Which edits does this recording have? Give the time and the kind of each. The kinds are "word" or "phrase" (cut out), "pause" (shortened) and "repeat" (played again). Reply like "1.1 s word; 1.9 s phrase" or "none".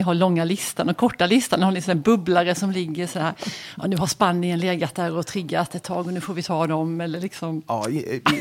none